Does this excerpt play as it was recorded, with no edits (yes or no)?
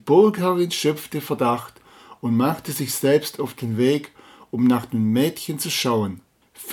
yes